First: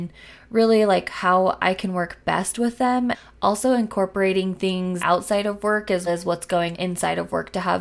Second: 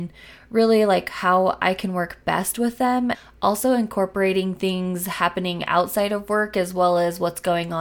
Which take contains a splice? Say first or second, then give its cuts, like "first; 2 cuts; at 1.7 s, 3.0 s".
first; 3 cuts; at 5.0 s, 6.1 s, 6.7 s